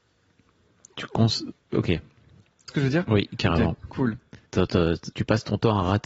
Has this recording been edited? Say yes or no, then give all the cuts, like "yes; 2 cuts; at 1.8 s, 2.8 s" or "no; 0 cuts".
yes; 3 cuts; at 2.7 s, 4.5 s, 5.1 s